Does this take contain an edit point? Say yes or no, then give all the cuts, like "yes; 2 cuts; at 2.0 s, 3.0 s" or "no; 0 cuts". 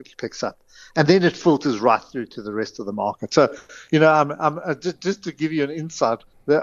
no; 0 cuts